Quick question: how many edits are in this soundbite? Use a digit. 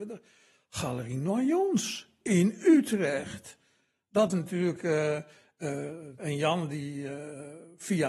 2